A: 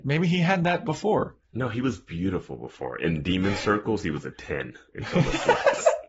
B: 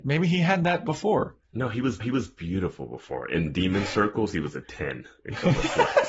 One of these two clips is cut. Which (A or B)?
B